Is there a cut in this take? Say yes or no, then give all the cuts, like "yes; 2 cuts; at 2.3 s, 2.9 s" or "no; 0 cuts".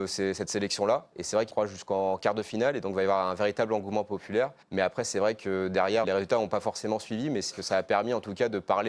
yes; 4 cuts; at 1.5 s, 4.6 s, 6.0 s, 7.5 s